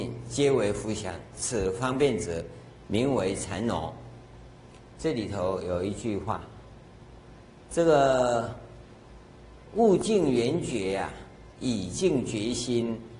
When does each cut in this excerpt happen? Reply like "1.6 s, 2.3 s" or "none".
none